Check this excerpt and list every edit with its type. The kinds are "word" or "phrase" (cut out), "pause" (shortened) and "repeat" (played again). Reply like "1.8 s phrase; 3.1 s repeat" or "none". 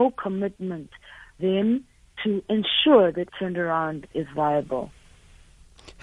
1.4 s word; 2.2 s word; 3.3 s word; 4.1 s word